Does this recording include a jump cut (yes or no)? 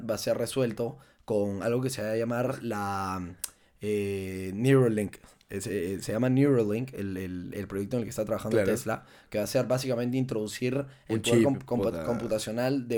no